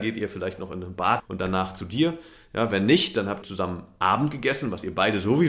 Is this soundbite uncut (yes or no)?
no